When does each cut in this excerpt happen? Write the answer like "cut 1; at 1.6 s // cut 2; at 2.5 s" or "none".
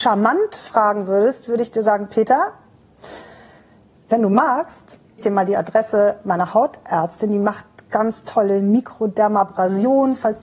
cut 1; at 5.2 s // cut 2; at 7.9 s